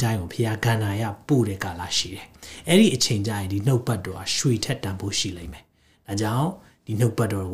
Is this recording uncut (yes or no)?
yes